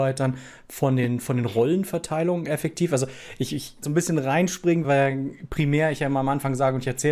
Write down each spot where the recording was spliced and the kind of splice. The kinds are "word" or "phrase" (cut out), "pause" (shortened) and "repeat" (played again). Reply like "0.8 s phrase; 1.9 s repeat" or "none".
3.8 s phrase; 4.8 s word